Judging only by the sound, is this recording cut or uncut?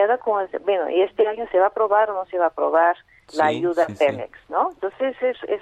uncut